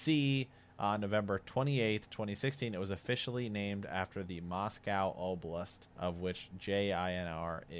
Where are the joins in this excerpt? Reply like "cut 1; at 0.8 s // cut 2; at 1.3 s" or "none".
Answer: cut 1; at 5.9 s